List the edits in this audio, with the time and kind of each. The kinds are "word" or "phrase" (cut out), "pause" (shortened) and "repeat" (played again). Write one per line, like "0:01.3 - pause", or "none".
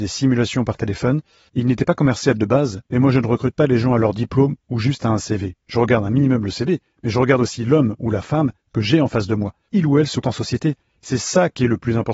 0:09.7 - word
0:10.2 - word